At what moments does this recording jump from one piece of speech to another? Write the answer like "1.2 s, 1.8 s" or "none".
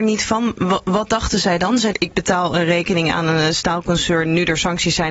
1.9 s